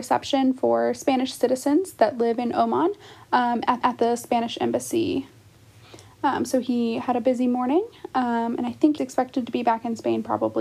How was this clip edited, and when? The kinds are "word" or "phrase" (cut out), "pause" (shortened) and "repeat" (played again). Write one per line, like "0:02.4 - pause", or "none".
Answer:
0:03.8 - repeat
0:09.0 - word